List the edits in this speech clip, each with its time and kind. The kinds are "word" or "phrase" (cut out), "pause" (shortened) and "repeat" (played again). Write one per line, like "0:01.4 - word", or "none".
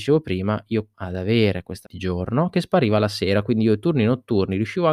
0:00.9 - word
0:01.8 - word